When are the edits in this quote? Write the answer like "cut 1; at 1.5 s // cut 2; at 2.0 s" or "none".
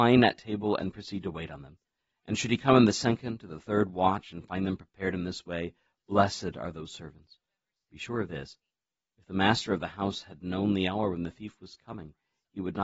none